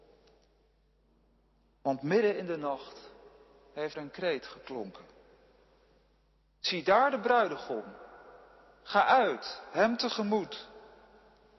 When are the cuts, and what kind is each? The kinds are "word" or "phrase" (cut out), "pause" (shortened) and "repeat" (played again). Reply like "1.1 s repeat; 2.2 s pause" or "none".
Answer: 3.9 s word